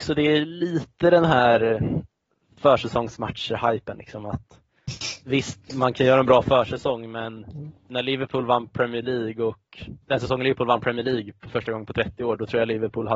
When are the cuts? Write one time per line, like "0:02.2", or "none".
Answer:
0:05.2
0:07.8
0:10.0